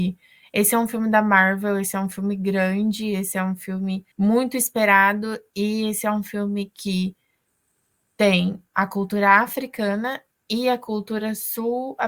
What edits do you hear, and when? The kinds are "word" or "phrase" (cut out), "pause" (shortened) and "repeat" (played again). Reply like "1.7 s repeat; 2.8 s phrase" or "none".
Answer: 4.1 s pause